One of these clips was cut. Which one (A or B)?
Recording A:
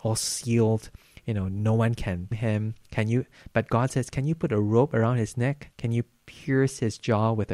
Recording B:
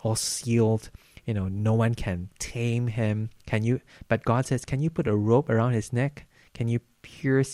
A